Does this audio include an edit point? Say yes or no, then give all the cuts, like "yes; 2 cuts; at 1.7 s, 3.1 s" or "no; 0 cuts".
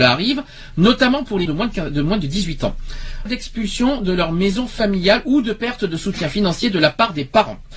yes; 2 cuts; at 1.5 s, 3.3 s